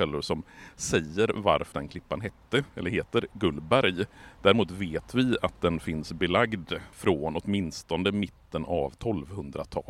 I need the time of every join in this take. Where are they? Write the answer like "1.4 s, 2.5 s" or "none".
1.7 s, 6.9 s